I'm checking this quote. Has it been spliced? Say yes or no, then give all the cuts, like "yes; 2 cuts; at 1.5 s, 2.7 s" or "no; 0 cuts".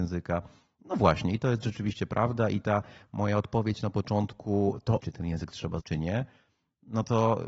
yes; 2 cuts; at 5.0 s, 5.8 s